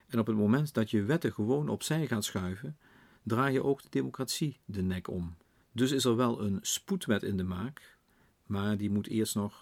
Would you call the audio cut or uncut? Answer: cut